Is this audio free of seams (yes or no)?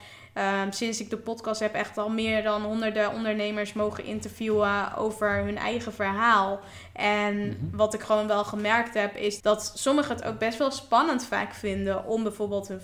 no